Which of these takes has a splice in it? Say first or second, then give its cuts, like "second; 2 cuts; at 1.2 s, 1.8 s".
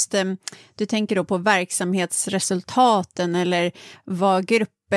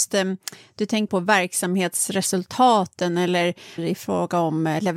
second; 2 cuts; at 1.1 s, 3.8 s